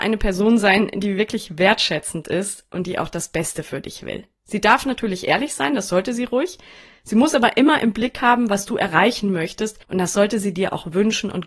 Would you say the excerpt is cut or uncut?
cut